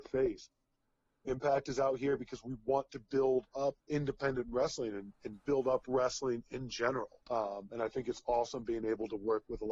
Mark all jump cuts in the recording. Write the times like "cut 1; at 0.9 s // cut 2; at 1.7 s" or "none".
cut 1; at 3.8 s // cut 2; at 7.2 s